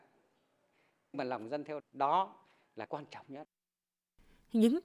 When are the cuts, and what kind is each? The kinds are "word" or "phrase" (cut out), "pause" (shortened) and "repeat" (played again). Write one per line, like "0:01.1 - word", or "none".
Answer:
0:01.1 - word
0:01.8 - word
0:02.9 - word